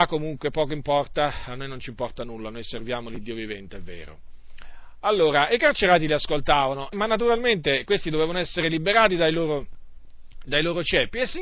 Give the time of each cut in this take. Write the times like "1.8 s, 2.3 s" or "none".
6.9 s, 10.5 s